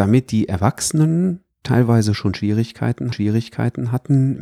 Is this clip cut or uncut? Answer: cut